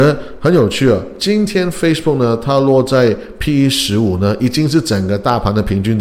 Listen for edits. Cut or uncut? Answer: uncut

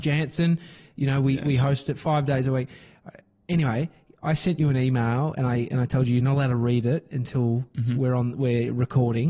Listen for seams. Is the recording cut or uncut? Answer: uncut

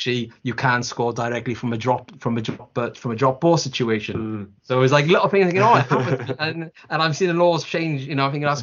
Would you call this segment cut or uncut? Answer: uncut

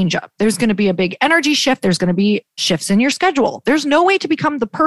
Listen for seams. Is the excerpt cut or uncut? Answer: uncut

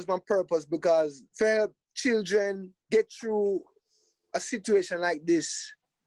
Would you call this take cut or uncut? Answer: cut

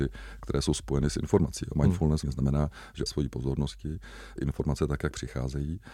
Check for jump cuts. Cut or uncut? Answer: cut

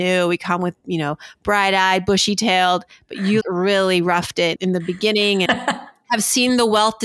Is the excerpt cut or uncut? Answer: cut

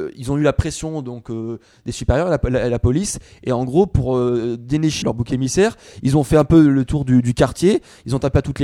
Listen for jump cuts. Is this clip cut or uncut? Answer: cut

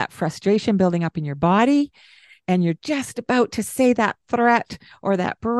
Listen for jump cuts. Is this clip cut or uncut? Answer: uncut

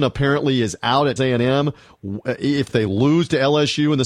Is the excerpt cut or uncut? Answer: cut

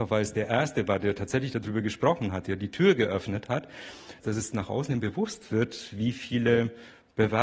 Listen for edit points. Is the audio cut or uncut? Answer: uncut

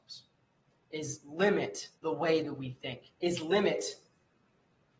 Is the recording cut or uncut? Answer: cut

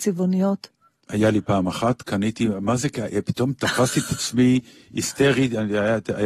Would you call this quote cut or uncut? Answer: uncut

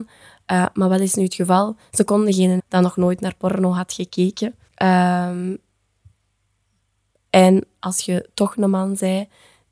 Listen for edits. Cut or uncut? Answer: cut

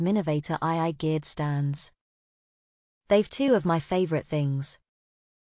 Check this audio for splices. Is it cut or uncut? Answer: uncut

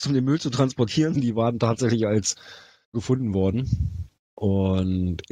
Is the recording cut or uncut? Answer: cut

